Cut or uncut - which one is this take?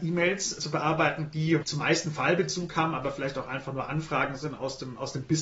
uncut